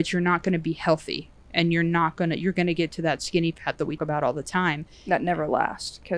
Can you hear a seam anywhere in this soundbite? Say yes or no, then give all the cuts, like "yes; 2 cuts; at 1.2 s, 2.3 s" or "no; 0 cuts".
yes; 1 cut; at 4.0 s